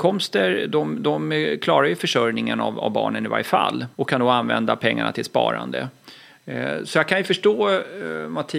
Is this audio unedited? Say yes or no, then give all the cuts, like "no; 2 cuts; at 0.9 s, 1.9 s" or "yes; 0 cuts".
no; 1 cut; at 3.9 s